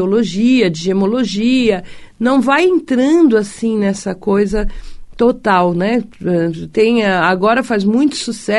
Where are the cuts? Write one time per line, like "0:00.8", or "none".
none